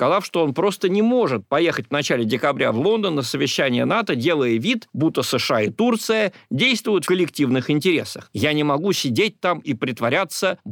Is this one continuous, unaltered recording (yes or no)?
no